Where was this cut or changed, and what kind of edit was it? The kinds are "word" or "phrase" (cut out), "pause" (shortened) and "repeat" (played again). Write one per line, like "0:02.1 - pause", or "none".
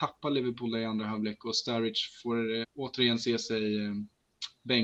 0:02.6 - word